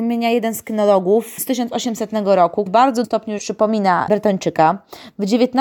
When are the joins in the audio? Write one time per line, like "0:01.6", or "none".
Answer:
0:01.4
0:02.7
0:03.0
0:03.4
0:04.1